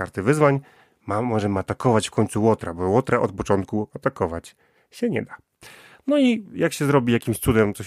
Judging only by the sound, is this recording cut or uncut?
uncut